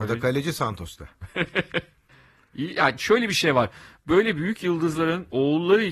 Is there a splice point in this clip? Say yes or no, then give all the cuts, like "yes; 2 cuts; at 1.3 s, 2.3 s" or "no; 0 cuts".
no; 0 cuts